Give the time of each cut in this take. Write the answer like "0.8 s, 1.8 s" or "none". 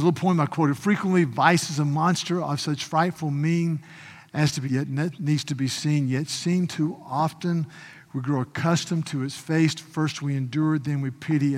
4.6 s